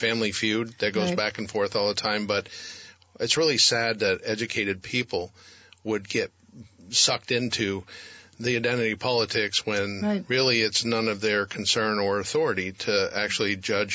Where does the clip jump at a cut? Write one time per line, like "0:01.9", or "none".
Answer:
none